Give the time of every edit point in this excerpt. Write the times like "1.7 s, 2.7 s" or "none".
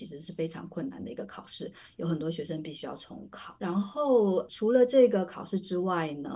3.6 s

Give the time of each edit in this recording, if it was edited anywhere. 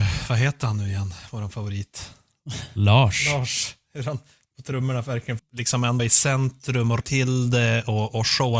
5.4 s, 6.0 s, 7.0 s

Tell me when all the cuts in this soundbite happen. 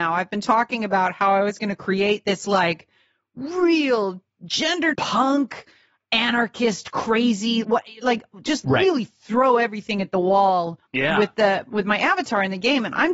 4.9 s, 7.6 s, 8.6 s, 10.9 s

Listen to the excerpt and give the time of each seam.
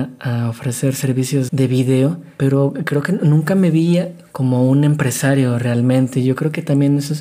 1.5 s

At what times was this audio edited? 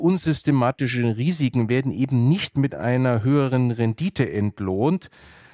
none

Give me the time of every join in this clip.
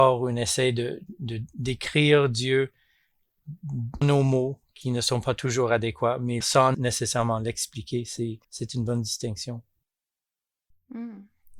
4.0 s, 6.4 s, 6.7 s, 8.4 s

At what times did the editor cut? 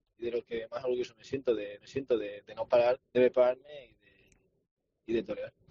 1.8 s, 3.1 s

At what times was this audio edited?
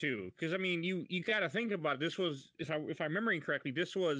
none

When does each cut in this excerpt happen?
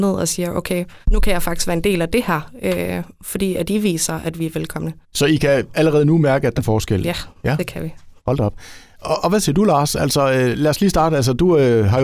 1.0 s, 5.0 s, 6.6 s, 8.2 s

